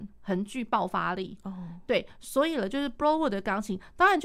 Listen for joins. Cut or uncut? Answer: uncut